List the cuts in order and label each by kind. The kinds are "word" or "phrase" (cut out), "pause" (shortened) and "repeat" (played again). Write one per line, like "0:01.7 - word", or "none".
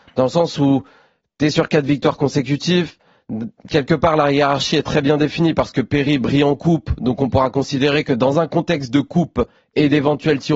none

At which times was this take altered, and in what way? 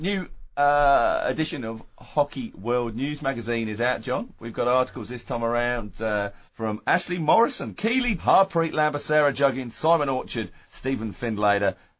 0:06.5 - pause
0:08.2 - word
0:10.6 - pause

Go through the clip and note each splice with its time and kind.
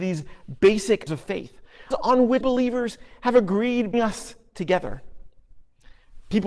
0:01.1 - word
0:01.9 - word
0:02.4 - word
0:03.9 - word

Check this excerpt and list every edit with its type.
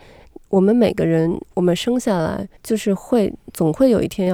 0:02.6 - pause

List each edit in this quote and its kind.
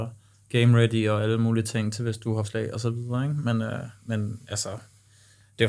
0:02.4 - word

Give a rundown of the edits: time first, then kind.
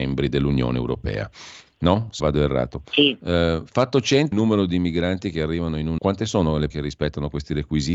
0:02.2 - word
0:04.3 - word
0:06.0 - word
0:06.7 - word

